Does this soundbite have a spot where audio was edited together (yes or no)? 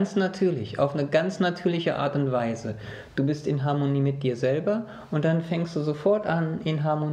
no